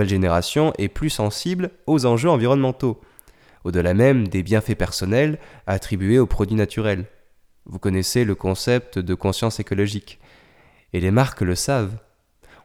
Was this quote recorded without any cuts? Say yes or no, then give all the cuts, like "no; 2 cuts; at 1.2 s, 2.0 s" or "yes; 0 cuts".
yes; 0 cuts